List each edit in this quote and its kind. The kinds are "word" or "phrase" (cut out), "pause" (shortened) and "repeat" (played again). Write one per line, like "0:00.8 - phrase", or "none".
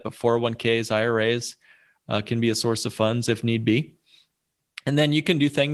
none